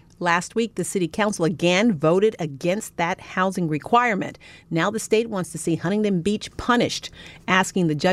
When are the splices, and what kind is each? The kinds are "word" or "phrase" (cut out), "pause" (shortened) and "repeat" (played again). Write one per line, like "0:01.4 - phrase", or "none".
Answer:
none